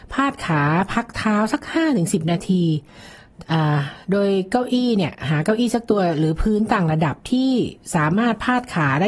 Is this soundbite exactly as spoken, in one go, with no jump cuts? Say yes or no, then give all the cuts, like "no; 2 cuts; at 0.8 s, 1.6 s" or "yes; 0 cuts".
no; 1 cut; at 4.0 s